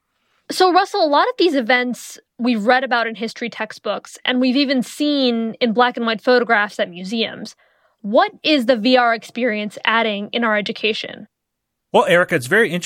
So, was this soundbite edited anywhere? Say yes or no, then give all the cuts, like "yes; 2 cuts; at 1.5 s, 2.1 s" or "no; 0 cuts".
no; 0 cuts